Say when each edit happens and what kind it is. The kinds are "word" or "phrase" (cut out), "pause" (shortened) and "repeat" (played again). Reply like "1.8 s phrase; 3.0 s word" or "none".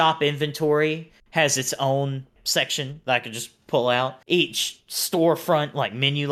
2.4 s word; 4.2 s pause